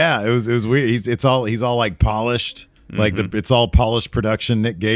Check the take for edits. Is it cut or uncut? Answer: cut